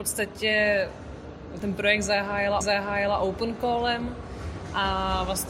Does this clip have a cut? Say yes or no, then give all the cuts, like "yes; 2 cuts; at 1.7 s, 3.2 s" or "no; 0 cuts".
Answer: yes; 2 cuts; at 1.6 s, 2.6 s